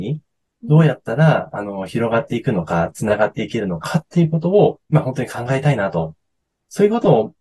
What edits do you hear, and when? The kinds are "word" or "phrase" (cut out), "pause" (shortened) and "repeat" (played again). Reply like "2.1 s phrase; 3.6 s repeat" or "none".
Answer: 4.8 s pause